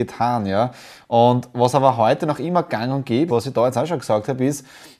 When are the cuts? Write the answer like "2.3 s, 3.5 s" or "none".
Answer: 3.3 s